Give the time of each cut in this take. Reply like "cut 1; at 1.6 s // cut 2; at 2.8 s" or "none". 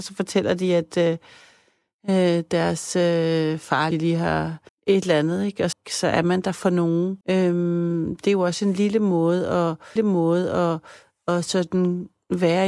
cut 1; at 3.9 s // cut 2; at 4.7 s // cut 3; at 5.7 s // cut 4; at 7.2 s // cut 5; at 10.0 s